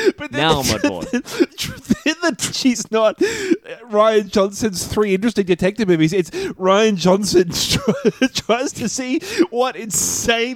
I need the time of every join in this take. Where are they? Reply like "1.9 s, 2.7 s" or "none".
1.5 s, 2.5 s